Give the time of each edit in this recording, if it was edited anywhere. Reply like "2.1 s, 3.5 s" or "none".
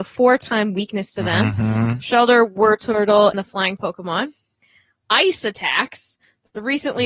3.3 s, 3.8 s